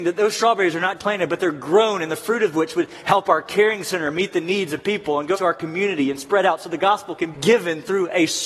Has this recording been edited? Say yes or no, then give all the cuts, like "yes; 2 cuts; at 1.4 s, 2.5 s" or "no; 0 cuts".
yes; 3 cuts; at 1.0 s, 5.3 s, 7.3 s